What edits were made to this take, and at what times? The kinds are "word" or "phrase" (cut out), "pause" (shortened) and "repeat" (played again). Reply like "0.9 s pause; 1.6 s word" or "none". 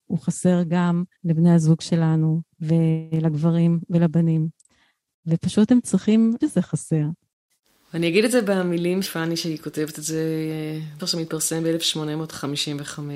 1.1 s pause; 2.5 s pause; 6.4 s word; 9.0 s word; 11.0 s word